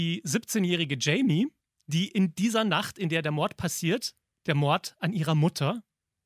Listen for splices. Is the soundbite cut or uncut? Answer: uncut